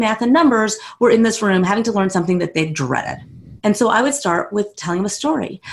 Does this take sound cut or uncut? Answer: cut